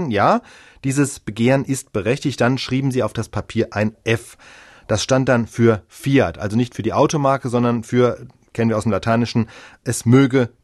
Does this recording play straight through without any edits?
yes; 0 cuts

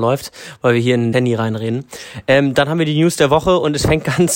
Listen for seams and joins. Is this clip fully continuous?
no; 1 cut; at 1.1 s

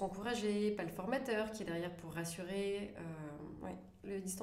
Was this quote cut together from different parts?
no; 0 cuts

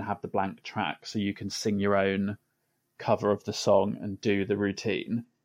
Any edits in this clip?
no; 0 cuts

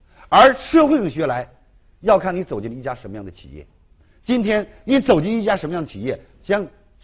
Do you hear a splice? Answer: no; 0 cuts

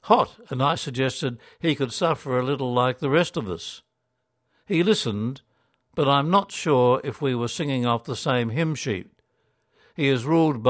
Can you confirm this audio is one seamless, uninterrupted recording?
yes; 0 cuts

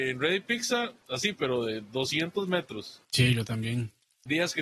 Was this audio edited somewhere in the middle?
yes; 1 cut; at 3.0 s

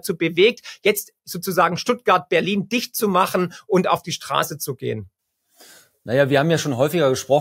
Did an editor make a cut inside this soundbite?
no; 0 cuts

